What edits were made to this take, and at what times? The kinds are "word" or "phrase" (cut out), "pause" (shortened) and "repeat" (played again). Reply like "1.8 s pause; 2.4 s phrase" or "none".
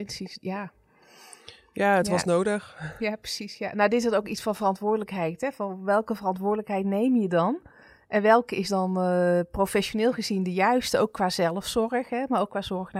none